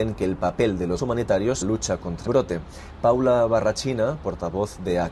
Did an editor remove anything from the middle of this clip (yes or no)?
yes